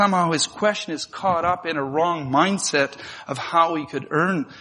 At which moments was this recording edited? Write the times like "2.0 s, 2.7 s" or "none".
none